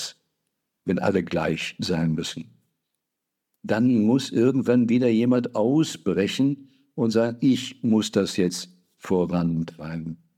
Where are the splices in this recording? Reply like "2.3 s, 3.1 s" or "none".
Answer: none

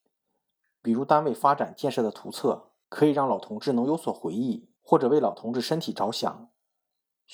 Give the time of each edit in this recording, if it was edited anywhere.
2.8 s, 4.8 s

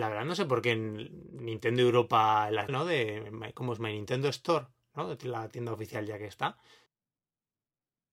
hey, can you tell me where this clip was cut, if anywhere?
2.7 s

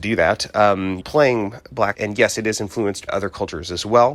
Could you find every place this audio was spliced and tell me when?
1.0 s, 1.9 s, 3.1 s

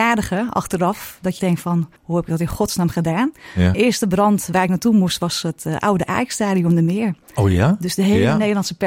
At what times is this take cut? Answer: 1.4 s, 2.0 s, 3.7 s

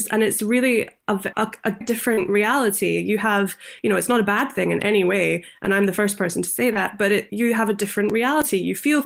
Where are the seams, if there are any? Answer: 1.3 s, 1.8 s, 7.3 s

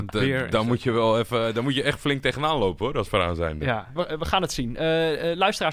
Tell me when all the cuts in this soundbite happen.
4.0 s

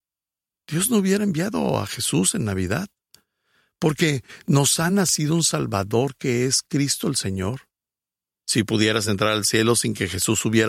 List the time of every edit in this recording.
none

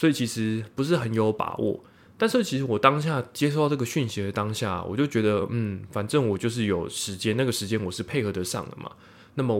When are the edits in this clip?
none

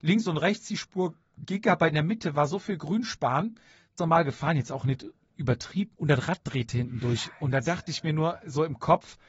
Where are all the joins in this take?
4.0 s, 5.9 s

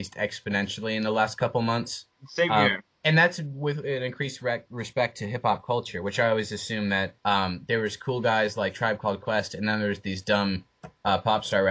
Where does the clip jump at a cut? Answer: 2.1 s, 7.2 s

